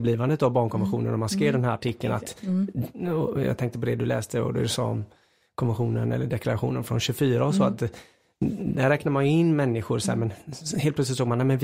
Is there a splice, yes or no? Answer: no